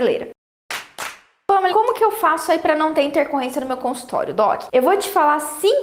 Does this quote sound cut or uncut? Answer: cut